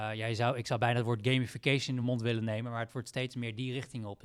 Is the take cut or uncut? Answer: uncut